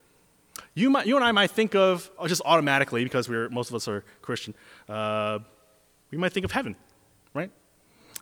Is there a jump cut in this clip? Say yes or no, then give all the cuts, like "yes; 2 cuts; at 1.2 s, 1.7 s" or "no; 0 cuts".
no; 0 cuts